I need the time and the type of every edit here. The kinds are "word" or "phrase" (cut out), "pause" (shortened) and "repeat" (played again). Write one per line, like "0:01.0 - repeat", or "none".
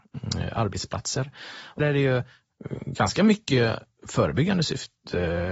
0:01.8 - word